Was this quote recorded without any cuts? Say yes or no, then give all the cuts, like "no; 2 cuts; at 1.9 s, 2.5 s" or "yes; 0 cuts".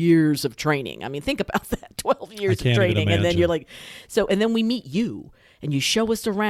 yes; 0 cuts